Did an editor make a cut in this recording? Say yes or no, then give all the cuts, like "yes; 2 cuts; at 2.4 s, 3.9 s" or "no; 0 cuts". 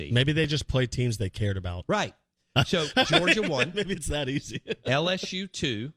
no; 0 cuts